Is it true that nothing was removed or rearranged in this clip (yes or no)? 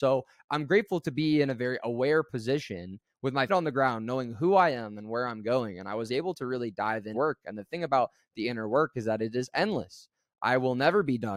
no